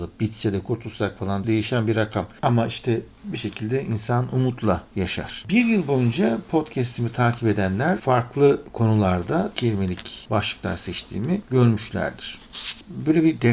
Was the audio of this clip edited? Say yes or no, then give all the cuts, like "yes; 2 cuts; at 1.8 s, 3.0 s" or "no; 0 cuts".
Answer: yes; 2 cuts; at 1.4 s, 9.5 s